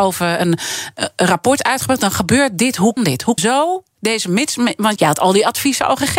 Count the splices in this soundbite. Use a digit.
3